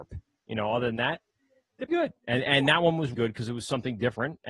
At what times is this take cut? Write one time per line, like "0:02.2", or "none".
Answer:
0:01.9
0:03.1